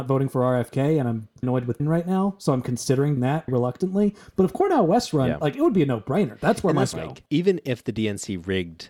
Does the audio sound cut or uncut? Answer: cut